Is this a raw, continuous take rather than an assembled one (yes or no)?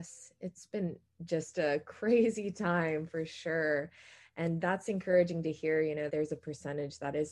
no